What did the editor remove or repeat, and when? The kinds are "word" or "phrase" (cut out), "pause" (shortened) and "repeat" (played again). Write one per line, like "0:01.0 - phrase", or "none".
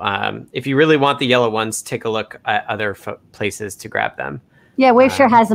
none